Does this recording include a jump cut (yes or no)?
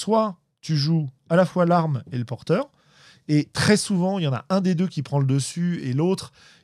no